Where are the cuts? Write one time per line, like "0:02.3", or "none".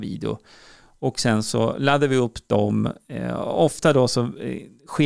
none